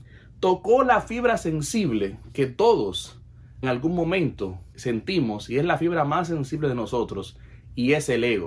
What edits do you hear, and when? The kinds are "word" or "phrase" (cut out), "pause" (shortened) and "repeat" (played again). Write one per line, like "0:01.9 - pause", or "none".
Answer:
0:03.6 - word
0:04.7 - pause